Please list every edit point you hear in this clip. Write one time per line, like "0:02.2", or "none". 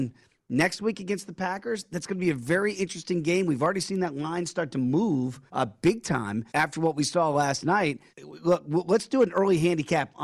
0:05.5
0:06.5
0:08.1